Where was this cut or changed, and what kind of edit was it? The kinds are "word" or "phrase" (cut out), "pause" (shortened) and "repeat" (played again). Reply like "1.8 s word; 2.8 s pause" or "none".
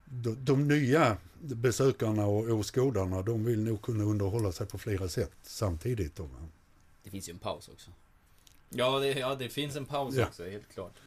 none